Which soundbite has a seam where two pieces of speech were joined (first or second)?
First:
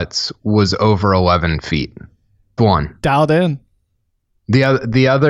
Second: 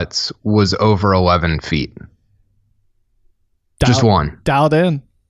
first